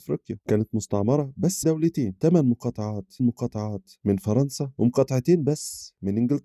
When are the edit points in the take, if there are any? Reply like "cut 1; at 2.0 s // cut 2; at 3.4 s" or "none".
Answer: cut 1; at 1.6 s // cut 2; at 3.2 s